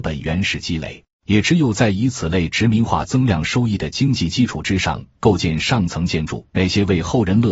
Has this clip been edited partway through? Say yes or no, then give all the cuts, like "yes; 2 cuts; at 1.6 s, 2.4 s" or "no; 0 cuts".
yes; 2 cuts; at 1.1 s, 6.5 s